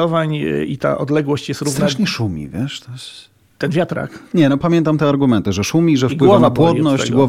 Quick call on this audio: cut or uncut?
uncut